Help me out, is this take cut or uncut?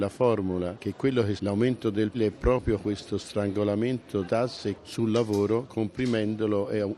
cut